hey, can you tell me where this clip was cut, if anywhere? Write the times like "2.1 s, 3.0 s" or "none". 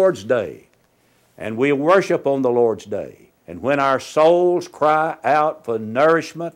3.4 s